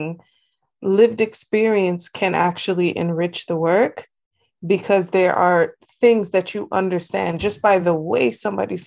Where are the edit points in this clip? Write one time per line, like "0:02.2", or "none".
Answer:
none